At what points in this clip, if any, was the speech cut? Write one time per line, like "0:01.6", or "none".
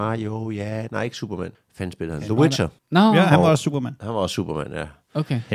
0:01.5
0:02.8